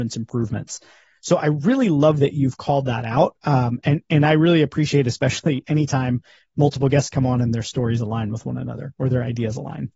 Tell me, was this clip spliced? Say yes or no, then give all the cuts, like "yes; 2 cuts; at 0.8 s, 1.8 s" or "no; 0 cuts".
no; 0 cuts